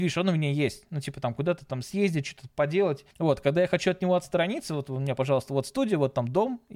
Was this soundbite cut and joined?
yes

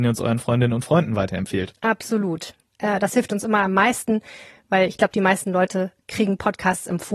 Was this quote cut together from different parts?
no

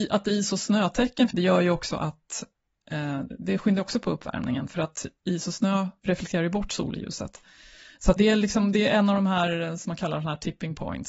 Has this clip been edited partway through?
yes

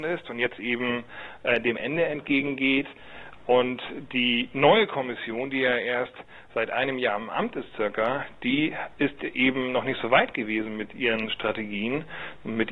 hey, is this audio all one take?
yes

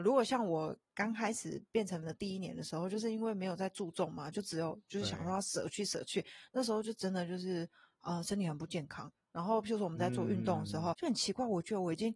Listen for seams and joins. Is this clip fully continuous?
no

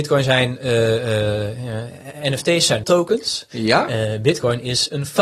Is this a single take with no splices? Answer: no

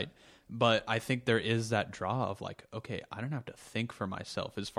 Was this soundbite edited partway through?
no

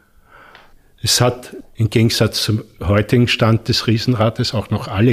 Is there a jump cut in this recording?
no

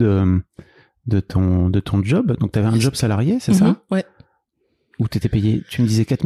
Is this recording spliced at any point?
no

